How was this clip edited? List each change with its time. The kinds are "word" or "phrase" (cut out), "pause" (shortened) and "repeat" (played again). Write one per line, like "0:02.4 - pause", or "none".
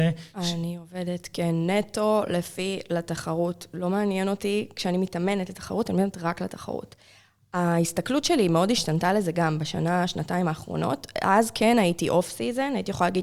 none